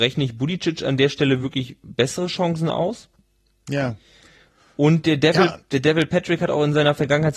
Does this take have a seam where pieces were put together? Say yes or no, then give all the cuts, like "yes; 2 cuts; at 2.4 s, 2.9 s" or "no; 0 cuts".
no; 0 cuts